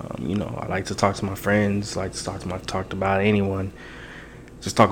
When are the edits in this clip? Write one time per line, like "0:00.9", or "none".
0:02.6